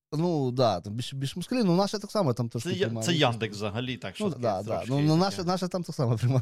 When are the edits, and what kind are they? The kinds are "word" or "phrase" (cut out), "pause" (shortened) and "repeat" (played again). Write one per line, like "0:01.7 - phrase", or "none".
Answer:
0:04.3 - word